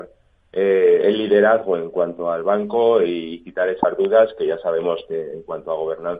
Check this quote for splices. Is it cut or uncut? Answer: uncut